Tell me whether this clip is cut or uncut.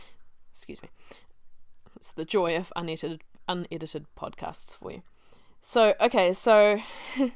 uncut